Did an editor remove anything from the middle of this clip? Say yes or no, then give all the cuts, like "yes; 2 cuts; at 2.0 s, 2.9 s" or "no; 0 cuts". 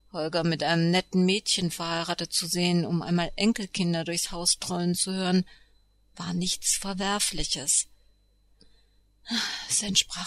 no; 0 cuts